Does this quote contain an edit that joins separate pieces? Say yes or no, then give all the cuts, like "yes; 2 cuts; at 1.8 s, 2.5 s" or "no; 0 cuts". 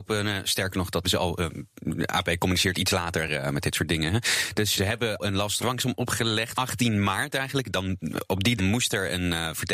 yes; 7 cuts; at 1.0 s, 2.7 s, 4.8 s, 5.2 s, 5.6 s, 6.5 s, 8.6 s